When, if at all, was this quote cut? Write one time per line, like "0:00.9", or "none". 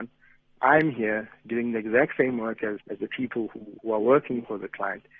0:02.8
0:03.8